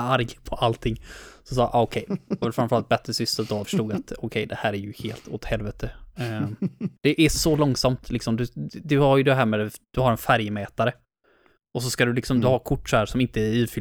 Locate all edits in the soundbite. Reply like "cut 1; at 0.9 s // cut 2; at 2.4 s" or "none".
cut 1; at 2.4 s // cut 2; at 3.6 s // cut 3; at 7.0 s